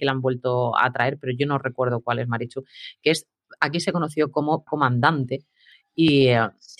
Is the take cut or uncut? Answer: cut